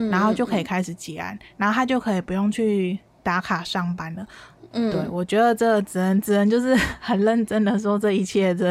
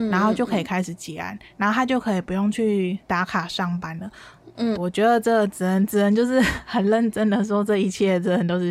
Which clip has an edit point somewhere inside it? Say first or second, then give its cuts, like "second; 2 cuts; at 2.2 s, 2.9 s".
second; 2 cuts; at 3.0 s, 4.8 s